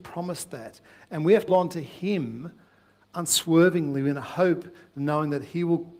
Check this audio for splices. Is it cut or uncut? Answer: cut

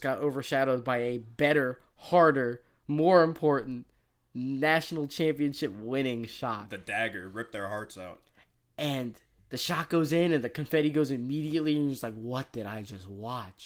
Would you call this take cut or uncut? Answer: uncut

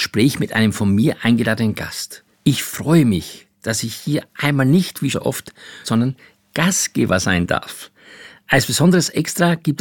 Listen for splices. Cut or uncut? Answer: cut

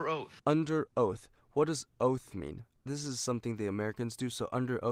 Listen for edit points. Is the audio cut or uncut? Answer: uncut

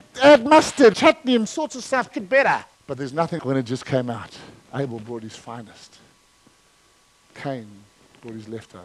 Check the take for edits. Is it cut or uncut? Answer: cut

